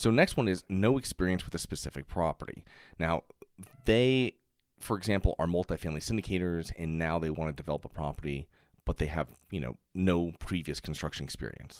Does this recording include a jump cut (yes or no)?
no